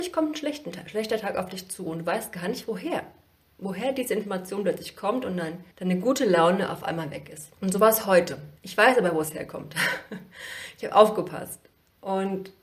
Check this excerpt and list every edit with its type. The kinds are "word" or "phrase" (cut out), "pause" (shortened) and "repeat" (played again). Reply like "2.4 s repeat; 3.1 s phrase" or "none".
5.7 s pause; 7.5 s pause; 8.6 s pause